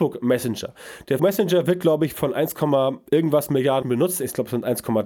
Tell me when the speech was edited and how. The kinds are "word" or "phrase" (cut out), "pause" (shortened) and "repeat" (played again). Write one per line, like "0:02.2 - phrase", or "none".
0:01.2 - word
0:02.1 - word
0:03.8 - word

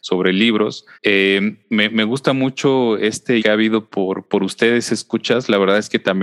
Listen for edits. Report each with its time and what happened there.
0:00.9 - pause
0:03.4 - word
0:04.3 - word

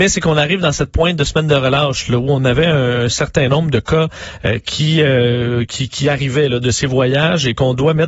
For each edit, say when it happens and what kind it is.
none

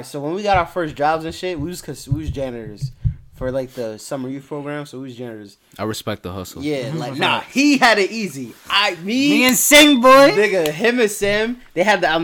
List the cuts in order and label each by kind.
none

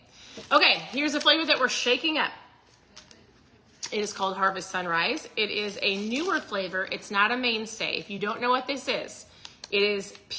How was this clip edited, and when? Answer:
none

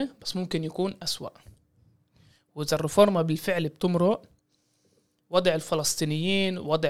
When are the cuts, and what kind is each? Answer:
none

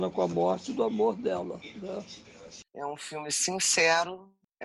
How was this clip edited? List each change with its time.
0:02.7 - pause

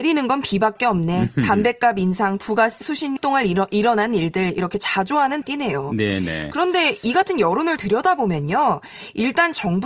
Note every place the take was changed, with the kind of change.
0:02.8 - word
0:03.2 - phrase
0:05.4 - phrase
0:07.8 - word

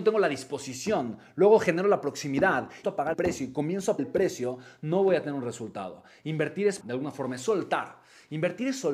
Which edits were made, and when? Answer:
0:02.8 - phrase
0:03.1 - word
0:04.0 - word
0:06.8 - word

